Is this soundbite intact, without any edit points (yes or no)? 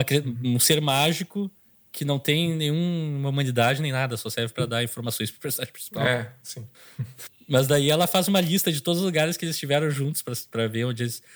yes